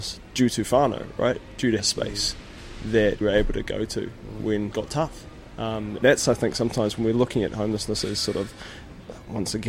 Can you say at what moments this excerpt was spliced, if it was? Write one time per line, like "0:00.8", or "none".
0:01.8
0:03.2
0:04.7
0:06.0